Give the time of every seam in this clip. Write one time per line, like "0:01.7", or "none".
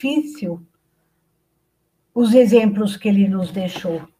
none